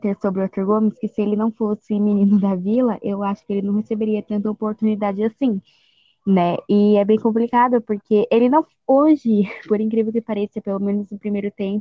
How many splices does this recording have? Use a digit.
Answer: 0